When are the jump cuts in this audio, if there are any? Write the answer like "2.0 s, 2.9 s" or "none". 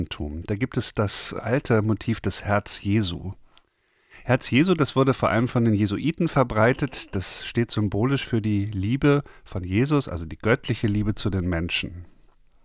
none